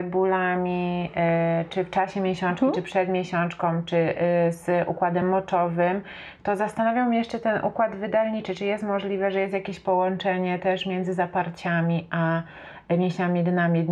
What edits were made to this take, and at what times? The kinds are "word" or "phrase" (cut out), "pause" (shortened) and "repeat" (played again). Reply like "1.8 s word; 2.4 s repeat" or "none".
none